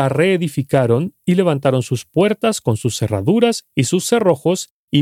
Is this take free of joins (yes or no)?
yes